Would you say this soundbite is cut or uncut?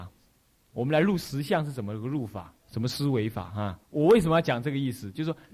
cut